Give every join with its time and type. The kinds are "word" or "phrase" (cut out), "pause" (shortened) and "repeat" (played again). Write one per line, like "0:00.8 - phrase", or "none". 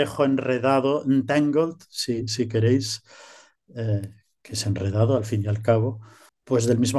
none